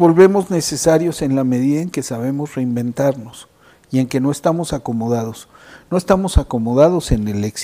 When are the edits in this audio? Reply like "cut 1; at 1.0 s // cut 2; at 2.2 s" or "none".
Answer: none